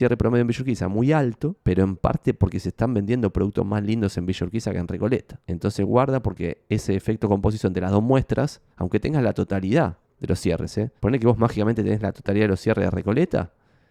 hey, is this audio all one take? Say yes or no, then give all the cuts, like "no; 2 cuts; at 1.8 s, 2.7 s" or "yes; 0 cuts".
no; 5 cuts; at 1.6 s, 5.4 s, 8.7 s, 10.0 s, 11.0 s